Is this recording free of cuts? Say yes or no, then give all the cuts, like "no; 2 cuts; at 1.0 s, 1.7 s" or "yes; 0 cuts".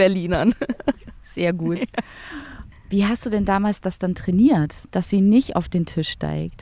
yes; 0 cuts